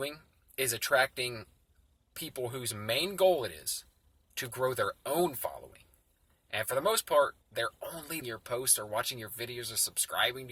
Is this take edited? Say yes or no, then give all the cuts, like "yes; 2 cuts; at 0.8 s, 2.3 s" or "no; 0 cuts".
yes; 2 cuts; at 7.4 s, 8.2 s